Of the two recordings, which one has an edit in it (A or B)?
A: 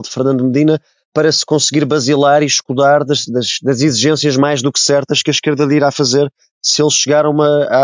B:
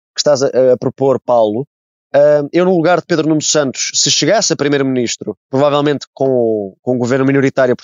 B